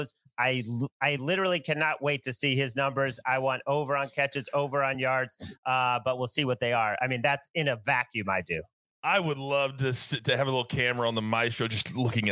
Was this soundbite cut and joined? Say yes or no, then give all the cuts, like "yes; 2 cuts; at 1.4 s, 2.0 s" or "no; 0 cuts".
no; 0 cuts